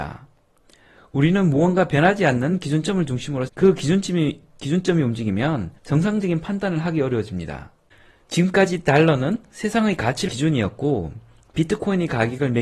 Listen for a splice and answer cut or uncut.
cut